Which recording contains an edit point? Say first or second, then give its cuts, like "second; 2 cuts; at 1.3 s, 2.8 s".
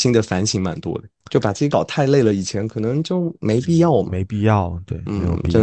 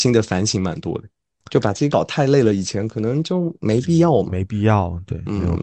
first; 1 cut; at 1.2 s